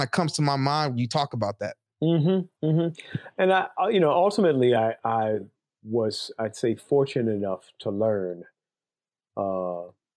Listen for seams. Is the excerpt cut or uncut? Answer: uncut